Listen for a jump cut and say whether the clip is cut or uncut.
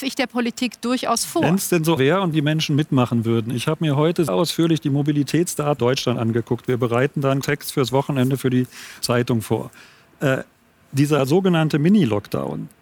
cut